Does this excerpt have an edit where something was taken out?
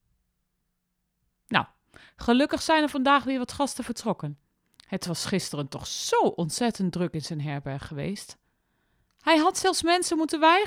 no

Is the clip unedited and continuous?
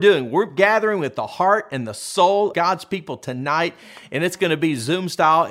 no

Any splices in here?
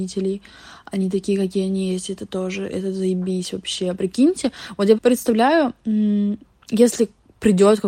yes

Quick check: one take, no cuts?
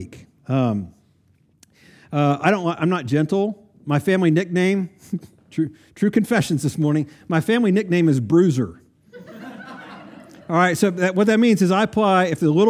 yes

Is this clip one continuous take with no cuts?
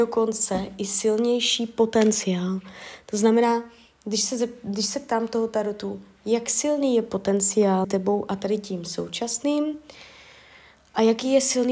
no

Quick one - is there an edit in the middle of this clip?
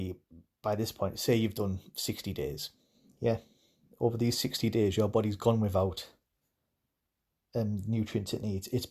no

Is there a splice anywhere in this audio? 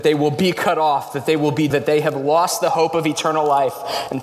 yes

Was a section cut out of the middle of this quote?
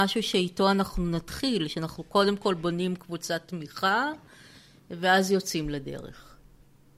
no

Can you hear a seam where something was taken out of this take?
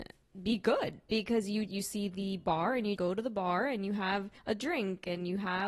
yes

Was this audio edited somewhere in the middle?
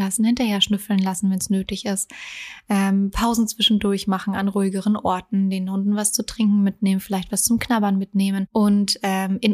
no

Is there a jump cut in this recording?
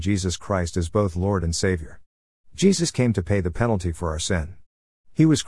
no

